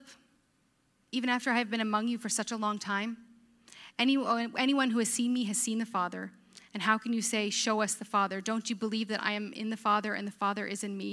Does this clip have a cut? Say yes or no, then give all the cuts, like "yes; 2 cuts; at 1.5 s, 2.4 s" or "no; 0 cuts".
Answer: no; 0 cuts